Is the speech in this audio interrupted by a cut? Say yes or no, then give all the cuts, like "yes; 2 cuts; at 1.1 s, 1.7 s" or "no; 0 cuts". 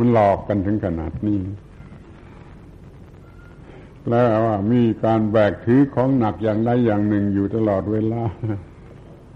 no; 0 cuts